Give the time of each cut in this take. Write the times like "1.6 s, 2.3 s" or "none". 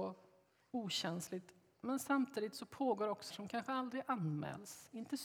3.3 s